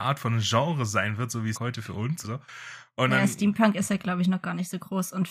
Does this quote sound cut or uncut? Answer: cut